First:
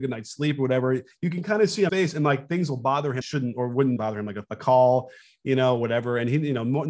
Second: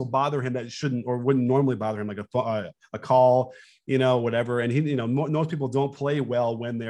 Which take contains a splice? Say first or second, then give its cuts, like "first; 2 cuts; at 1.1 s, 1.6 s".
first; 4 cuts; at 1.9 s, 3.2 s, 4.0 s, 4.5 s